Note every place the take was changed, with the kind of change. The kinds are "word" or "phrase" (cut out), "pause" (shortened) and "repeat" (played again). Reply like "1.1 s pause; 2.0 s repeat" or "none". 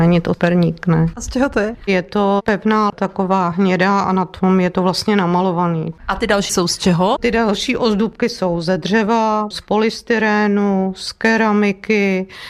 2.9 s word; 6.5 s word; 9.5 s word